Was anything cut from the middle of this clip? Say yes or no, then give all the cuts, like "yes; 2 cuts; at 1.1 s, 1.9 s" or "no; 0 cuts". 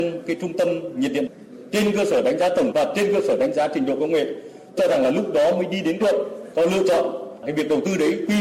yes; 3 cuts; at 2.7 s, 4.8 s, 6.0 s